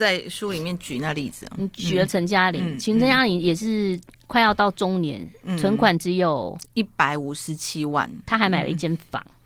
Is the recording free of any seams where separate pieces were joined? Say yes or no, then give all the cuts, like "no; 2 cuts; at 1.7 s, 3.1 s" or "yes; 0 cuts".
yes; 0 cuts